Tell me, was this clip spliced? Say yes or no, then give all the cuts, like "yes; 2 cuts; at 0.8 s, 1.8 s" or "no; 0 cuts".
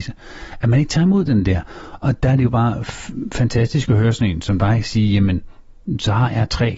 no; 0 cuts